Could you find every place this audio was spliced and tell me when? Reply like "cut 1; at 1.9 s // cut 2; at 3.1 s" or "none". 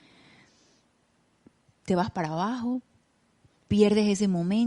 none

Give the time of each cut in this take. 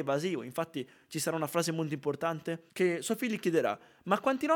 cut 1; at 2.7 s

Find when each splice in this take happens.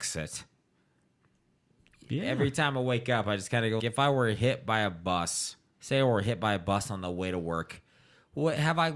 cut 1; at 3.8 s // cut 2; at 5.7 s

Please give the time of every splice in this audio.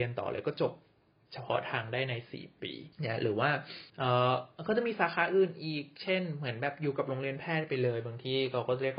cut 1; at 2.9 s // cut 2; at 3.9 s

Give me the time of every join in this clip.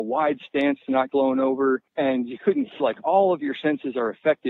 cut 1; at 1.1 s // cut 2; at 1.9 s // cut 3; at 2.8 s

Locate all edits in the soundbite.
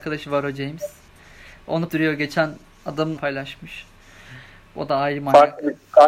cut 1; at 1.9 s // cut 2; at 3.2 s

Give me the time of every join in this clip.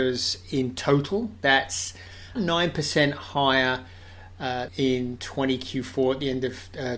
cut 1; at 2.4 s // cut 2; at 4.7 s

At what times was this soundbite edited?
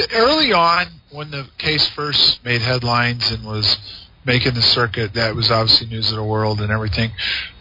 none

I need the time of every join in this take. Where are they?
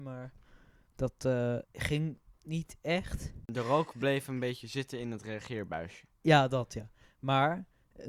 cut 1; at 1.7 s

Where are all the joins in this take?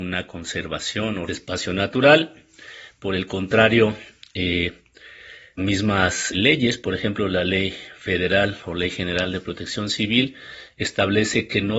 cut 1; at 1.3 s // cut 2; at 5.6 s // cut 3; at 6.3 s

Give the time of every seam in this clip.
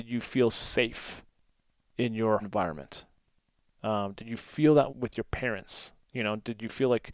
cut 1; at 2.4 s // cut 2; at 4.9 s

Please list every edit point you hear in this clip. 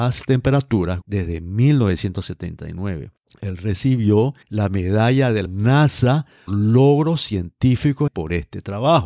cut 1; at 1.0 s // cut 2; at 3.2 s // cut 3; at 4.4 s // cut 4; at 5.5 s // cut 5; at 6.5 s // cut 6; at 8.1 s

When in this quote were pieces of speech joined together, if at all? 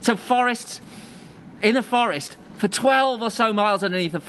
none

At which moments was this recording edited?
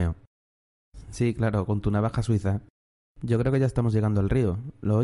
none

